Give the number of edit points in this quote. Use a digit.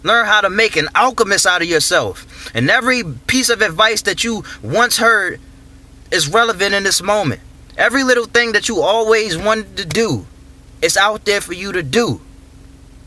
0